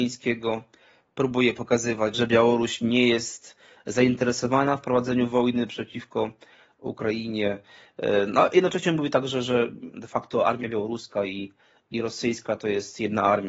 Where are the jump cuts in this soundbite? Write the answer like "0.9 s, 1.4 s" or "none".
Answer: none